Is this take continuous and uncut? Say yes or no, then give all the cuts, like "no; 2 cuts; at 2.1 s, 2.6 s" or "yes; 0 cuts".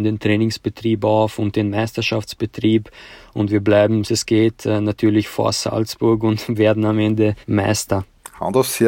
no; 2 cuts; at 4.0 s, 7.4 s